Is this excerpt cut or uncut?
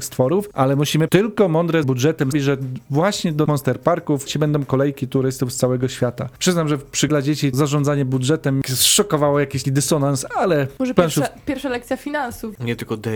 cut